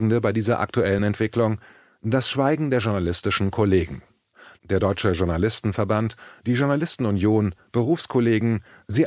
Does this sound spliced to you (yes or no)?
no